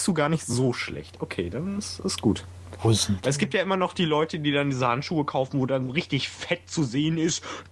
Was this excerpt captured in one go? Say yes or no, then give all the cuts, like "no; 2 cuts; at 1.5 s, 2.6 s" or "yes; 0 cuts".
yes; 0 cuts